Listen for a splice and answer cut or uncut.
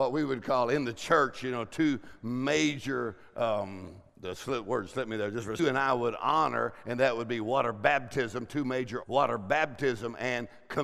cut